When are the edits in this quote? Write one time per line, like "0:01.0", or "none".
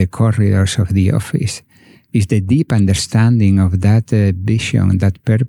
none